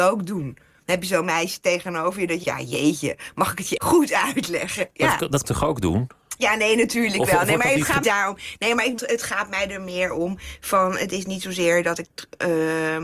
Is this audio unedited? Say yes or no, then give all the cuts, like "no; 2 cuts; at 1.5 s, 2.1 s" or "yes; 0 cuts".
no; 5 cuts; at 2.4 s, 3.8 s, 5.4 s, 8.0 s, 9.0 s